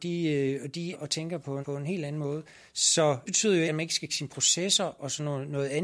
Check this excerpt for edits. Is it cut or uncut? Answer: cut